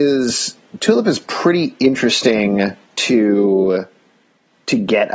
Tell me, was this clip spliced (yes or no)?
yes